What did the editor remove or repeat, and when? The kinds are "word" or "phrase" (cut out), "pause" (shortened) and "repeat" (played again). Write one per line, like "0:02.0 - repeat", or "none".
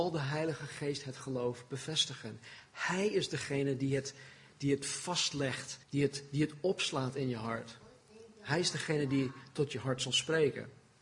0:05.8 - pause

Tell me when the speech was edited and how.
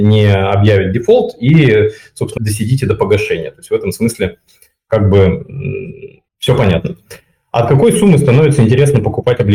0:02.4 - word
0:06.3 - pause

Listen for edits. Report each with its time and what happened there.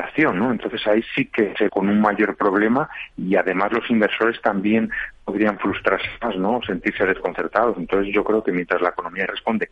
0:01.7 - word

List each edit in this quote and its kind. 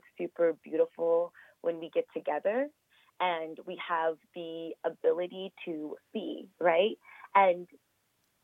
0:06.1 - word

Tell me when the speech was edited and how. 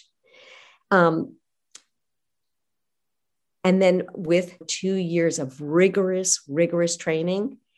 0:04.6 - phrase

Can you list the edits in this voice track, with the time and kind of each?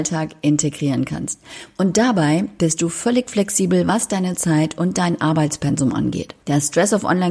0:06.4 - pause

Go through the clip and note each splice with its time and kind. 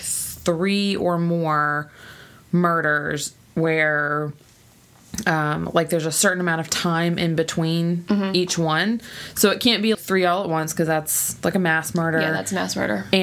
0:09.9 - word

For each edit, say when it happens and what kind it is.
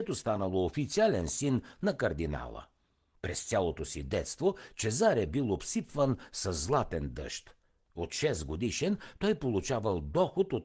none

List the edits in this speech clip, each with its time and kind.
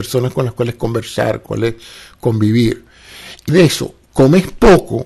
0:01.5 - word
0:03.5 - word

